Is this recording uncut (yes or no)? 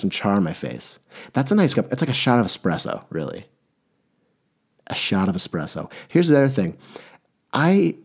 no